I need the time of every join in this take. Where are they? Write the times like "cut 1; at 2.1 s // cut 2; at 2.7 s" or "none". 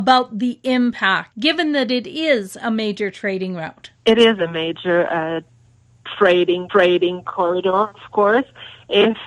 cut 1; at 3.9 s // cut 2; at 6.7 s